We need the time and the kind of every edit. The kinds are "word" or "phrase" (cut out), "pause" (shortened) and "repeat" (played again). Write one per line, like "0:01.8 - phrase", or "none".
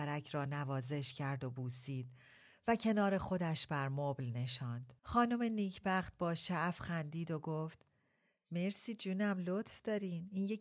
0:05.0 - pause